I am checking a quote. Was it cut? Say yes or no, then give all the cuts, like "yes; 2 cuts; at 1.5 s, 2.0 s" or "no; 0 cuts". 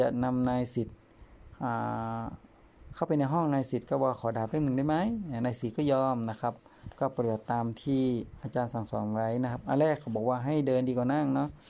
yes; 1 cut; at 6.9 s